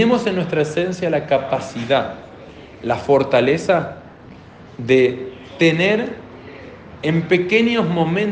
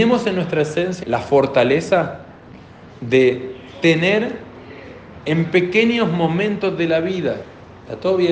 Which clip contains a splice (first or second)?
second